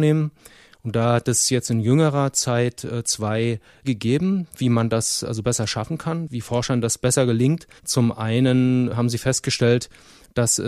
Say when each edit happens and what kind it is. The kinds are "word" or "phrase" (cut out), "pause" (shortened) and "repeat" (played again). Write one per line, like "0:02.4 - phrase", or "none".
0:03.8 - word
0:07.8 - pause
0:08.9 - word